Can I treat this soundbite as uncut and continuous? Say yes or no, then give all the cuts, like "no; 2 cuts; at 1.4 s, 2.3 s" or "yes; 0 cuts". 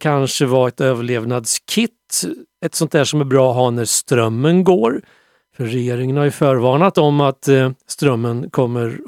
yes; 0 cuts